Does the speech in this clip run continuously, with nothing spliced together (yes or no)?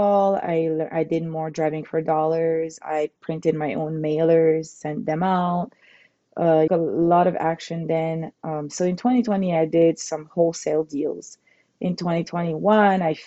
no